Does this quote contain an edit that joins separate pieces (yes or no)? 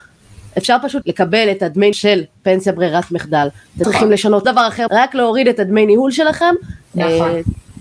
yes